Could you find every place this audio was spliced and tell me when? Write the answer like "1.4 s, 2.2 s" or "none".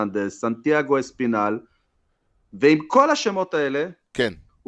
none